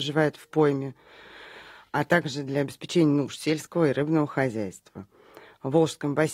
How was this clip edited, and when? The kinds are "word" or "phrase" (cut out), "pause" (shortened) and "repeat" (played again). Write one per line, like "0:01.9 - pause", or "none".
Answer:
none